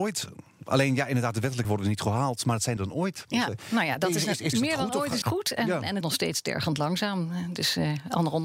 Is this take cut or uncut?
cut